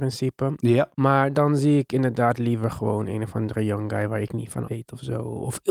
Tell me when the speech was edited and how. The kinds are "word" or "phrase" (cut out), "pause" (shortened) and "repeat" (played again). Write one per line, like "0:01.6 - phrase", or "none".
0:00.9 - pause
0:04.7 - word